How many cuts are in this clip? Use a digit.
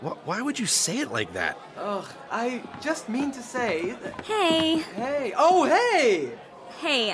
0